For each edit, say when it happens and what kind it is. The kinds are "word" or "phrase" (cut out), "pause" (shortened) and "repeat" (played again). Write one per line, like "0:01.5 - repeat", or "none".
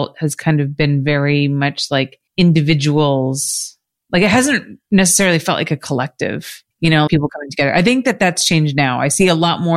0:02.3 - pause
0:06.7 - pause
0:07.1 - word